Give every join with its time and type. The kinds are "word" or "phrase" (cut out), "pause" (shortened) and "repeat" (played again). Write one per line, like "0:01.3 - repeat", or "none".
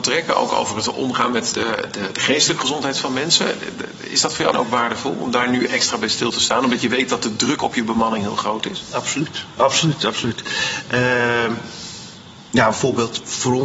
0:01.5 - word
0:04.5 - phrase

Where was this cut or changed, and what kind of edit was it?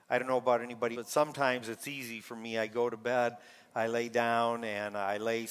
0:00.9 - word

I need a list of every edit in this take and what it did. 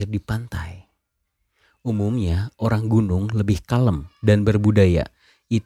none

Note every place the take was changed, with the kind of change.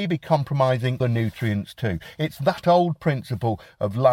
0:01.0 - word

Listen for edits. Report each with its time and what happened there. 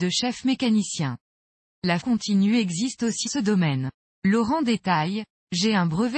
0:02.0 - word
0:03.3 - word

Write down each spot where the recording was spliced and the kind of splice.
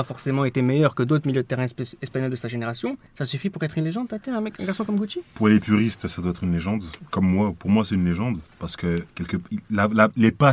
0:03.1 - pause
0:04.6 - word
0:08.5 - pause
0:09.1 - pause

